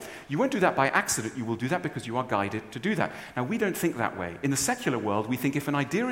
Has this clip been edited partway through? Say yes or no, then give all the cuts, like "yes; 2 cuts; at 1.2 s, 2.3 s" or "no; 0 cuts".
no; 0 cuts